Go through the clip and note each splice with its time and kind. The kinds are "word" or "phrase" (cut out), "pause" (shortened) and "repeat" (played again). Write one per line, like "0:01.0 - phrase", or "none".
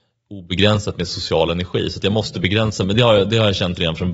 none